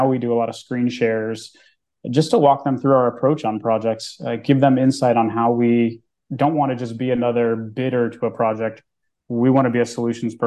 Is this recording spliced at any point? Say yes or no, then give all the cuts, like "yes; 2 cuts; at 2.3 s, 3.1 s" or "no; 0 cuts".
no; 0 cuts